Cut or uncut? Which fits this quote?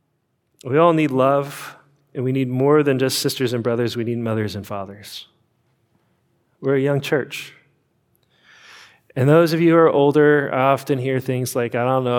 uncut